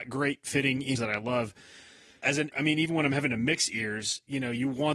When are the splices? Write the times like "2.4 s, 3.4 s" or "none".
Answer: 1.0 s, 2.5 s